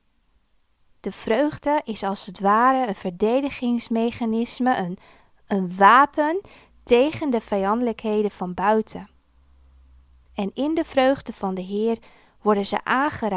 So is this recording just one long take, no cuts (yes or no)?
yes